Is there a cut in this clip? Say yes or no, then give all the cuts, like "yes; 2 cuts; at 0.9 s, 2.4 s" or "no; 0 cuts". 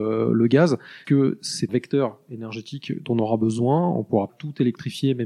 yes; 4 cuts; at 1.0 s, 1.7 s, 3.0 s, 4.3 s